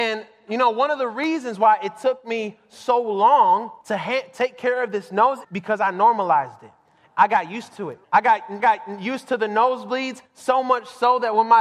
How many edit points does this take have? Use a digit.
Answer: 5